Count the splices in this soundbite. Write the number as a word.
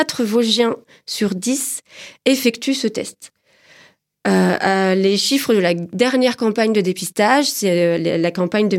zero